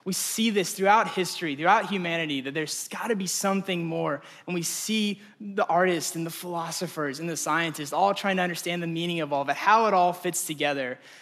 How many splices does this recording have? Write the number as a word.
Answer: zero